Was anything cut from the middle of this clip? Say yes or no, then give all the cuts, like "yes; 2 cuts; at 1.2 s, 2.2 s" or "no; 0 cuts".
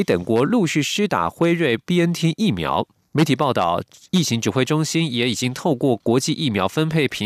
no; 0 cuts